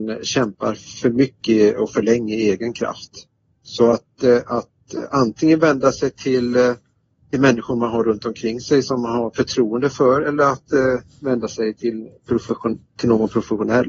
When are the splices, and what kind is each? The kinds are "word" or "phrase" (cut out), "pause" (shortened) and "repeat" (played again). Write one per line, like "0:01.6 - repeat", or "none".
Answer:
none